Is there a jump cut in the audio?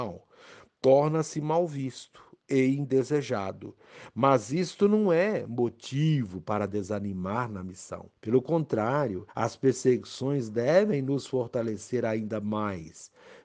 yes; 2 cuts; at 8.2 s, 9.3 s

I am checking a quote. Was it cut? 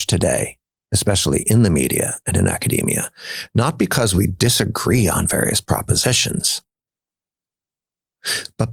no; 0 cuts

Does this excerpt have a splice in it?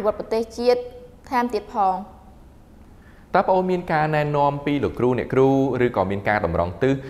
no; 0 cuts

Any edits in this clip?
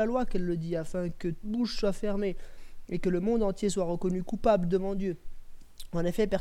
yes; 1 cut; at 1.4 s

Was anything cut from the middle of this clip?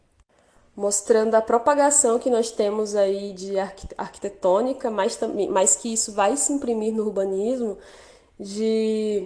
no; 0 cuts

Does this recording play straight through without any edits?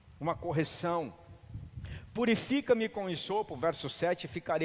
yes; 0 cuts

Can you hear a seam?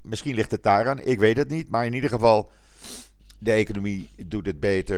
no; 0 cuts

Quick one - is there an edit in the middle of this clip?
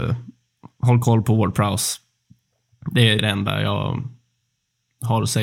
yes; 1 cut; at 3.2 s

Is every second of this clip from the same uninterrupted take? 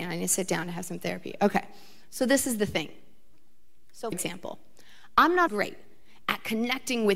no; 2 cuts; at 4.1 s, 5.5 s

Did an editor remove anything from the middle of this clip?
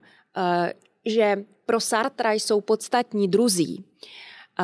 no; 0 cuts

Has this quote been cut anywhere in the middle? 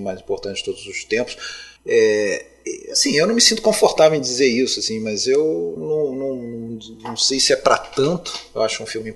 yes; 2 cuts; at 1.8 s, 5.8 s

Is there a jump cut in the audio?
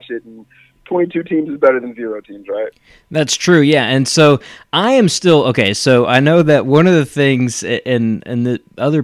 no; 0 cuts

